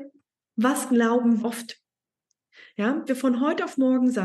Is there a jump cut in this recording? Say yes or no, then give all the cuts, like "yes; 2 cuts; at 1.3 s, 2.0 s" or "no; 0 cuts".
yes; 2 cuts; at 1.4 s, 3.1 s